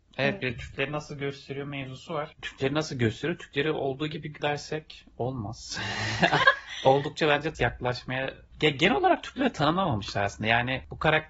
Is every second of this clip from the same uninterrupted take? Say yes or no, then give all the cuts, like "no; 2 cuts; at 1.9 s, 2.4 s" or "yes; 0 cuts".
no; 3 cuts; at 4.4 s, 6.4 s, 7.5 s